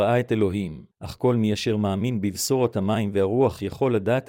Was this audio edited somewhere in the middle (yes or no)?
yes